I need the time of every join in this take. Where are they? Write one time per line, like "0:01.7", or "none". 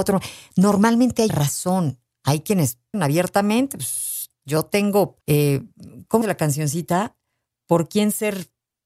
0:01.3
0:02.9
0:05.2
0:06.2